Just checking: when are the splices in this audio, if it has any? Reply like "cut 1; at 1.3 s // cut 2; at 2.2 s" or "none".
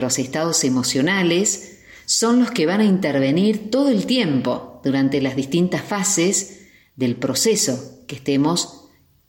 none